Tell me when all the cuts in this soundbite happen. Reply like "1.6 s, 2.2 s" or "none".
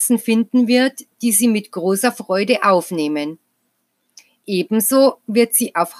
none